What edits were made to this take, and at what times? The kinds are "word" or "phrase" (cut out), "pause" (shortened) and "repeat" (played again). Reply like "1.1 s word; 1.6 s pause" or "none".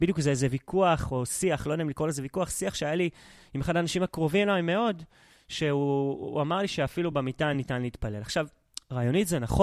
none